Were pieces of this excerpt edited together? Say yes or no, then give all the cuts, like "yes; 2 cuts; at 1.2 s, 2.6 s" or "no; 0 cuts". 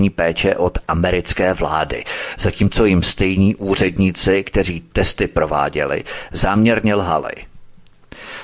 no; 0 cuts